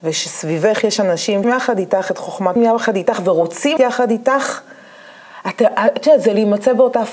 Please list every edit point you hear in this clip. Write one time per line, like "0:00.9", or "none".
0:01.4
0:02.6
0:03.8